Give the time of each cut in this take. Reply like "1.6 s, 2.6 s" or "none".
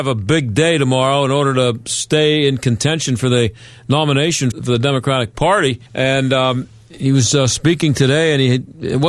4.5 s, 5.9 s